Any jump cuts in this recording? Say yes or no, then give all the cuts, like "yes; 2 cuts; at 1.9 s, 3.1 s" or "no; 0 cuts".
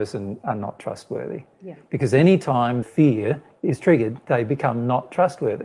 yes; 1 cut; at 2.8 s